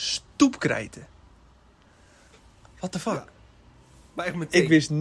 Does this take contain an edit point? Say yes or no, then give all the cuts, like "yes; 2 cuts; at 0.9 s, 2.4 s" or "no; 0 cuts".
no; 0 cuts